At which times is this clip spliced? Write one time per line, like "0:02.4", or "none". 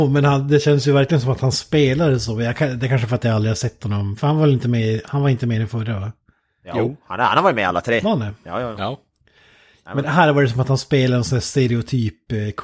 none